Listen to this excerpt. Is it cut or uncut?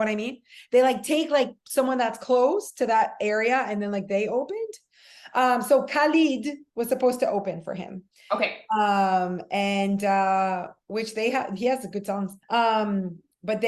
cut